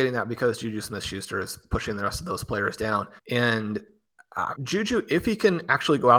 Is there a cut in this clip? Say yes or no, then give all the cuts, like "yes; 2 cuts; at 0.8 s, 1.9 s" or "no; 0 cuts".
yes; 2 cuts; at 3.2 s, 4.5 s